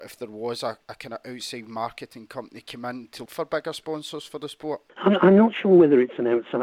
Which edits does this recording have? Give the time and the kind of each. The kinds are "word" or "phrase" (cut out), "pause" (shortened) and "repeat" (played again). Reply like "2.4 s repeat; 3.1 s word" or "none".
3.3 s word; 4.9 s pause